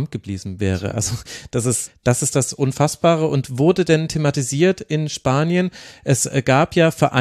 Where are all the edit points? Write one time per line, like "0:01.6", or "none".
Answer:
0:01.9

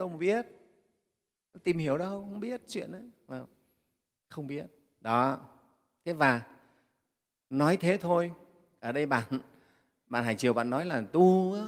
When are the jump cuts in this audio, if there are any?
none

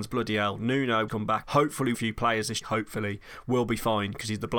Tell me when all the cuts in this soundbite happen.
0:01.1
0:01.4
0:01.9
0:02.6

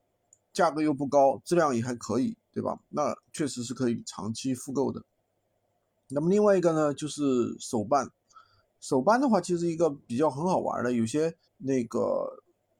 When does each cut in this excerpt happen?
0:03.2
0:11.5

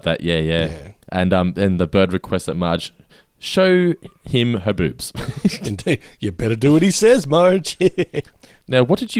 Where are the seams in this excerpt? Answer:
0:01.0
0:04.1

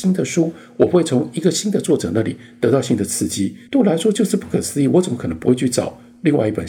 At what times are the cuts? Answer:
0:03.7

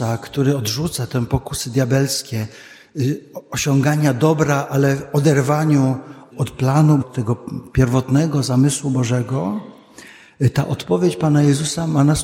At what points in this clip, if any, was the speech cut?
0:06.3
0:07.0

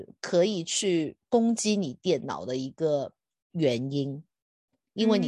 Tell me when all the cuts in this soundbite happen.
none

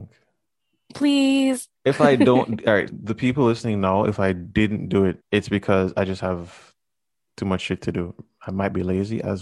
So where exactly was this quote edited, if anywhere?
0:01.8
0:02.9
0:05.2

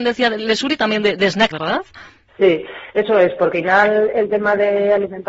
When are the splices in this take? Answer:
0:01.5
0:03.5

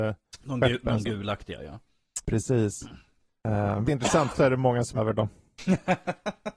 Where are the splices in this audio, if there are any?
0:03.8
0:04.3
0:05.0

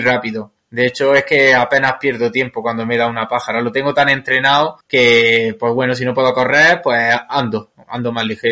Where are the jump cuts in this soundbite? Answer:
0:04.8

